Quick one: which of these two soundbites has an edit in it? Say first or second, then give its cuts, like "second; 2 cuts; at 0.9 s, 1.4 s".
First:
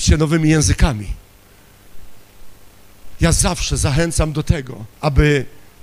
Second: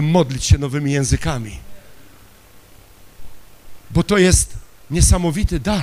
first; 1 cut; at 4.9 s